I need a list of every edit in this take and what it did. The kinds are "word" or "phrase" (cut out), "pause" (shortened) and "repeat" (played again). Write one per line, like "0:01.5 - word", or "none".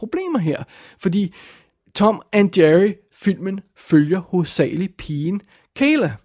none